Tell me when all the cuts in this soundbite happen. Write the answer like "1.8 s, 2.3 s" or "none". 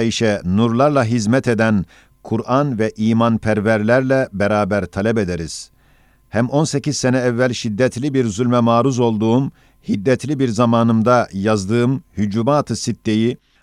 none